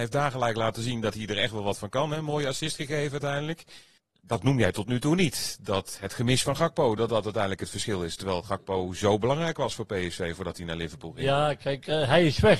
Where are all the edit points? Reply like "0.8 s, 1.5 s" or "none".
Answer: none